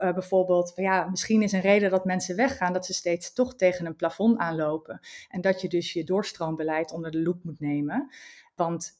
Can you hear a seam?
no; 0 cuts

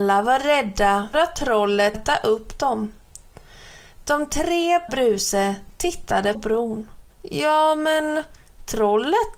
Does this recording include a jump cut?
yes; 5 cuts; at 1.1 s, 1.9 s, 4.9 s, 6.3 s, 7.1 s

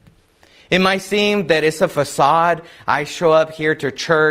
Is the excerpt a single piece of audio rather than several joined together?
yes; 0 cuts

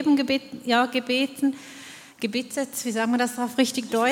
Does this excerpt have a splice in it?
no; 0 cuts

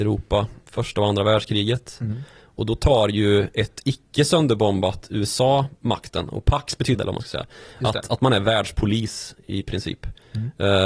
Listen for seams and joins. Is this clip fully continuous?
no; 2 cuts; at 5.8 s, 6.9 s

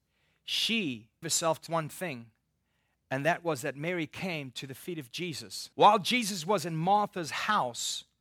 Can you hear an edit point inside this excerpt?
yes; 3 cuts; at 1.2 s, 1.7 s, 5.7 s

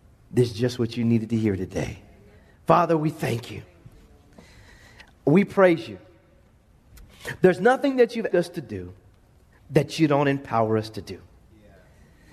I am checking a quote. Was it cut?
yes; 1 cut; at 8.3 s

